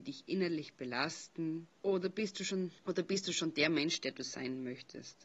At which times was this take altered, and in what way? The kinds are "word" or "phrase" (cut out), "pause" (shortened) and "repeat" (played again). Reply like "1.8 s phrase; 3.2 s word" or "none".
1.7 s pause; 2.8 s pause

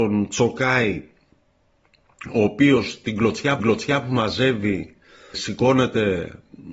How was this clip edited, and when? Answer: 3.6 s repeat; 5.3 s word

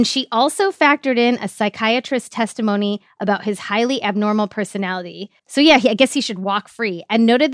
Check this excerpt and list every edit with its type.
5.4 s pause

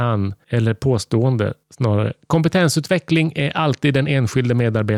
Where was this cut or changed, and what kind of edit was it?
none

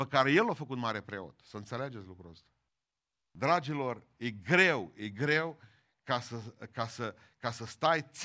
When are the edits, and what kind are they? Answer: 2.7 s pause

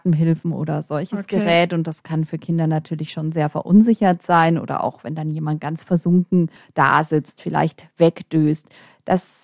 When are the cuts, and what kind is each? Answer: none

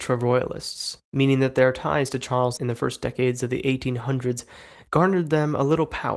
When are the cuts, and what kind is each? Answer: 2.6 s word

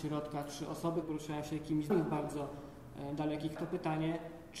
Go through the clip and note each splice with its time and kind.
1.0 s word; 1.9 s word; 3.6 s word

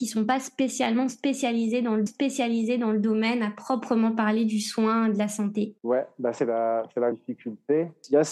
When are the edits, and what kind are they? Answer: 2.1 s repeat; 5.8 s pause; 6.4 s word; 7.1 s word

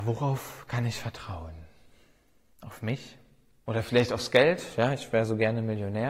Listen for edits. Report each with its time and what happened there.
none

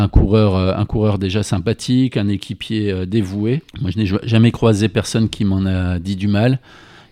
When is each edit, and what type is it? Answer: 3.7 s pause

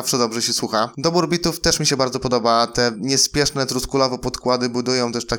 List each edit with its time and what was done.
none

